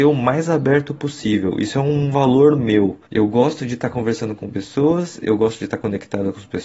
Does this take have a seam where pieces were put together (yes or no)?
yes